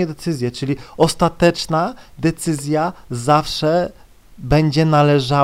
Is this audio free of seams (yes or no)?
yes